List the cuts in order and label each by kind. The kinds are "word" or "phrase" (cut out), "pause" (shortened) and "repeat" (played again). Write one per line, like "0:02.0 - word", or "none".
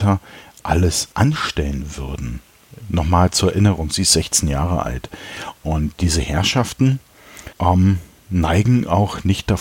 0:01.1 - pause
0:07.5 - pause